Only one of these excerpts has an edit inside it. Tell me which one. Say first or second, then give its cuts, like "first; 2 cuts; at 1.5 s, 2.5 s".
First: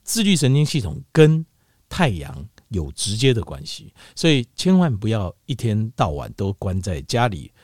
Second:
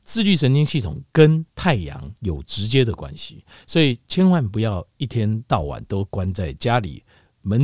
second; 2 cuts; at 1.5 s, 2.2 s